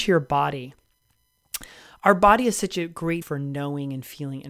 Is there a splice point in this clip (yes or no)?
yes